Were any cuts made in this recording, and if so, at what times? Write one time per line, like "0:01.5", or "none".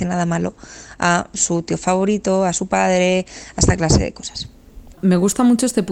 none